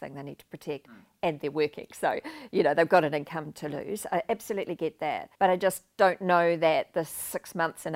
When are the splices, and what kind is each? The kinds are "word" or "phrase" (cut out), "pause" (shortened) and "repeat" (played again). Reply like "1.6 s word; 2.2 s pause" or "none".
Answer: 5.3 s pause